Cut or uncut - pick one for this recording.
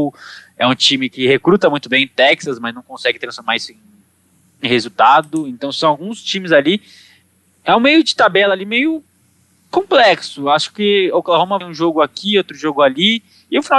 cut